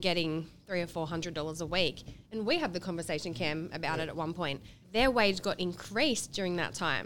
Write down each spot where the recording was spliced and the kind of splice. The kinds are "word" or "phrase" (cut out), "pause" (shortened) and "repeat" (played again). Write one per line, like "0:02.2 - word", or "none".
0:04.8 - pause